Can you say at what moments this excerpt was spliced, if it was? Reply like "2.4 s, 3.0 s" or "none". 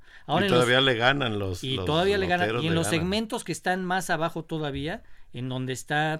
none